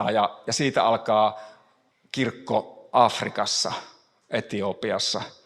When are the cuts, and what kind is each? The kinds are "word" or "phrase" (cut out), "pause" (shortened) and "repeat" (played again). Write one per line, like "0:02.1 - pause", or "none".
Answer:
0:01.9 - pause